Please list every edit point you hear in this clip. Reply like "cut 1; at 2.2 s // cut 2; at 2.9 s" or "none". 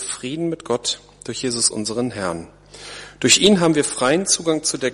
cut 1; at 1.7 s